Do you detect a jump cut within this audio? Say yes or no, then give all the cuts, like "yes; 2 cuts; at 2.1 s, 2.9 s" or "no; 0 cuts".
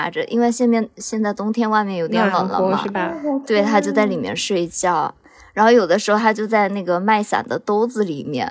no; 0 cuts